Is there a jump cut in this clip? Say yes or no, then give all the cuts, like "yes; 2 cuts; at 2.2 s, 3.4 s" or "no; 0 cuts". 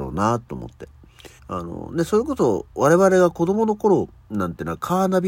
yes; 1 cut; at 1.4 s